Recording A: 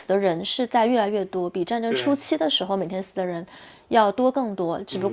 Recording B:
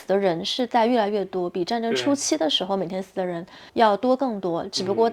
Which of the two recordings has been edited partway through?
B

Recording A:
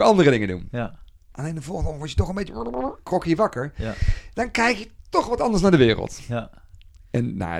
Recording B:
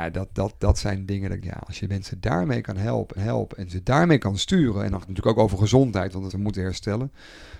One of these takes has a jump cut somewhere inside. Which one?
B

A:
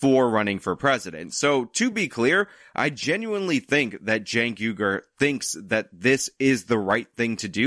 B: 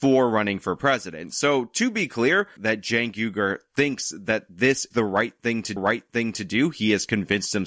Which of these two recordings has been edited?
B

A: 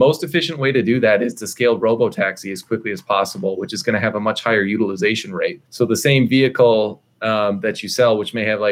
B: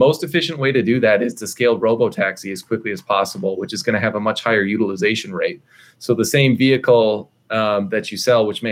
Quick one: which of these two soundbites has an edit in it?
A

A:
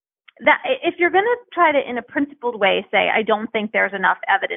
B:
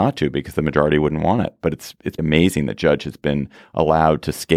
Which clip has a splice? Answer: B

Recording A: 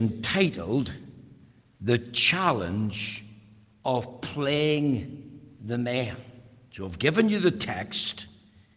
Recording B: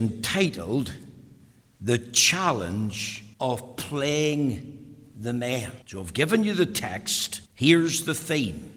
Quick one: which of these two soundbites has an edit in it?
B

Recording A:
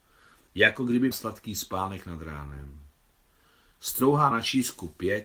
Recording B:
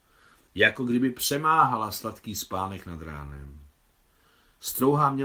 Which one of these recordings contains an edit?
A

